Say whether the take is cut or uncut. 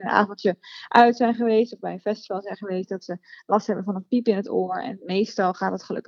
uncut